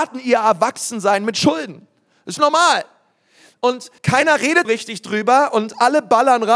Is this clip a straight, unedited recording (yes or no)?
no